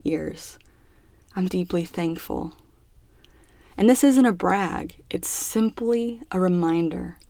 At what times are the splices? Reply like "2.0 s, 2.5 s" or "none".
1.5 s